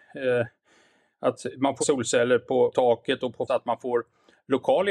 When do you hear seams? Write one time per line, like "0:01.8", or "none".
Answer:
0:01.8
0:02.7
0:03.5

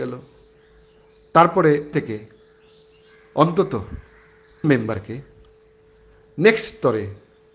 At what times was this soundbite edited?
0:01.9
0:04.6

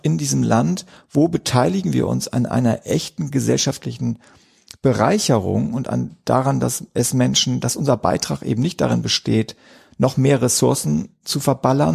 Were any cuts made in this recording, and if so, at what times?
none

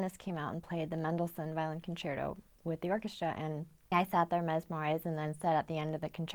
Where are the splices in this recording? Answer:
0:03.9

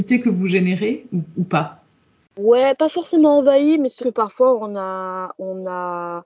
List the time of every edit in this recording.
0:04.0

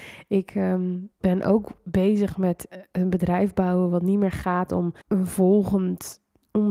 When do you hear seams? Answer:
0:01.1
0:05.0

